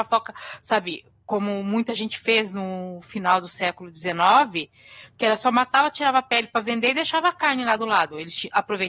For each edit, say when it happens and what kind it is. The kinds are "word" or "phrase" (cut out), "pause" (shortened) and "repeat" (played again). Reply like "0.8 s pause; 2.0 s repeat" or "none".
none